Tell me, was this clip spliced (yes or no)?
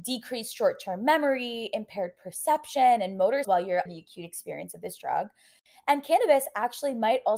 yes